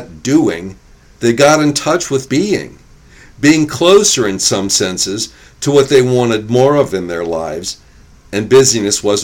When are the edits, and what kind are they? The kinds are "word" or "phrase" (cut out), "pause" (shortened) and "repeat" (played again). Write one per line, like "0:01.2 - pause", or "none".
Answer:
0:02.3 - word